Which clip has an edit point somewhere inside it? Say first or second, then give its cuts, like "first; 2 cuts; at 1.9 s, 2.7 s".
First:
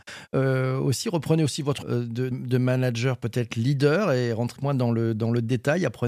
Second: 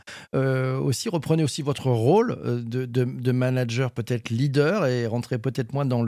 first; 3 cuts; at 1.8 s, 2.3 s, 4.6 s